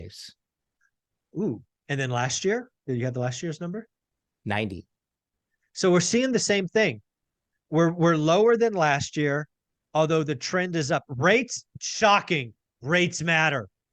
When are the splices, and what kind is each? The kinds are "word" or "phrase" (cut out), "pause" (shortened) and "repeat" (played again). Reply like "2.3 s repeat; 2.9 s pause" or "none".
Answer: none